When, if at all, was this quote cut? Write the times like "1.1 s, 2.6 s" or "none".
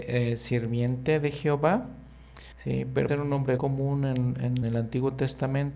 2.5 s, 3.1 s, 3.6 s, 4.6 s